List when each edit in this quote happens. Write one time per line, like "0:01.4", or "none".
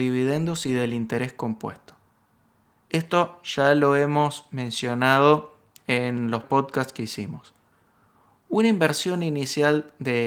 0:06.4